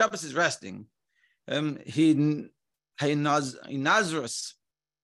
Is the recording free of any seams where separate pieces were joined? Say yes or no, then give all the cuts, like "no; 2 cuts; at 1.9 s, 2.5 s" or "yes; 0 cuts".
yes; 0 cuts